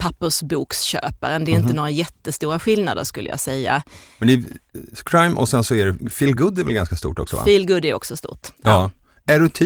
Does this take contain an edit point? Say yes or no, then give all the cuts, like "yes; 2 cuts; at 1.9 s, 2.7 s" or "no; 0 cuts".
no; 0 cuts